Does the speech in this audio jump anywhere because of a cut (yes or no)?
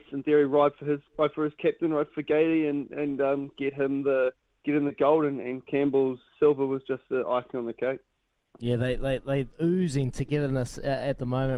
yes